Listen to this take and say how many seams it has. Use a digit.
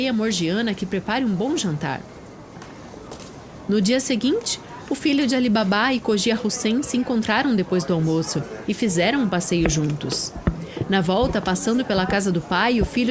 0